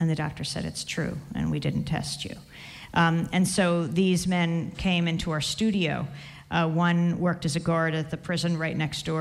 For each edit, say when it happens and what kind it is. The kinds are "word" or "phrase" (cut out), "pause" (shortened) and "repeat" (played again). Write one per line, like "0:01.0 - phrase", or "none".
none